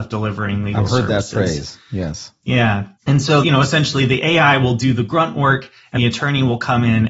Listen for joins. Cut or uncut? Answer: cut